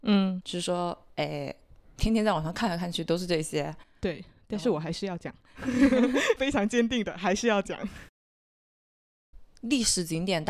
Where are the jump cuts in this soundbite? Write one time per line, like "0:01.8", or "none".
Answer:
none